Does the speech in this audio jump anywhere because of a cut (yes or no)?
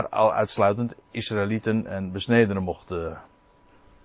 no